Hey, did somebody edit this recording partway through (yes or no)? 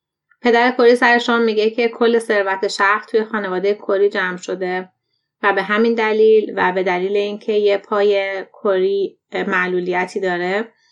no